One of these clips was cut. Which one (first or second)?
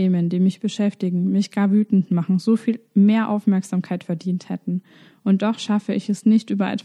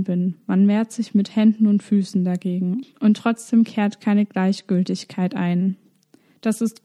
second